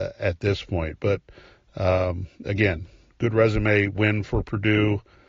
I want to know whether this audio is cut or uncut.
uncut